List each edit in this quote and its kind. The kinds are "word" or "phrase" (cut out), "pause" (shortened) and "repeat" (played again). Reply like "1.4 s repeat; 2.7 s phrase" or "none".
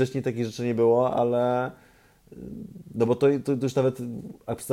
none